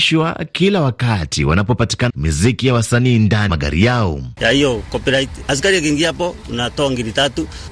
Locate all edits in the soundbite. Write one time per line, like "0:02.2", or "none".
0:02.1
0:03.5